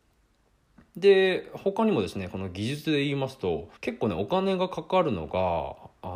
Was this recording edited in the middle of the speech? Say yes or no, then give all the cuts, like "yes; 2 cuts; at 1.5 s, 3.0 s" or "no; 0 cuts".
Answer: yes; 1 cut; at 3.8 s